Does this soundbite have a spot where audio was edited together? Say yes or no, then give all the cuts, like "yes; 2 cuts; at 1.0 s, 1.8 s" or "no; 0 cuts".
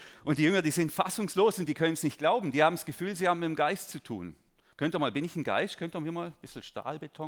no; 0 cuts